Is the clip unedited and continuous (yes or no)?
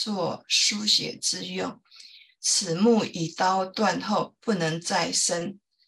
yes